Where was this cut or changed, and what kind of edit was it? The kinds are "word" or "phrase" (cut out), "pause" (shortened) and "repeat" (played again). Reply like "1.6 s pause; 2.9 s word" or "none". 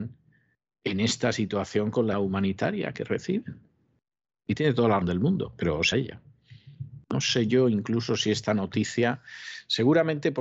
2.1 s word; 5.0 s word; 5.9 s word